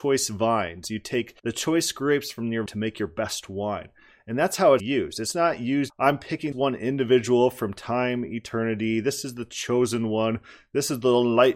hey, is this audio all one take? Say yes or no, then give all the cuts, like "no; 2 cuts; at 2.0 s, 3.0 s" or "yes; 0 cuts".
no; 5 cuts; at 1.4 s, 2.7 s, 4.8 s, 5.9 s, 6.5 s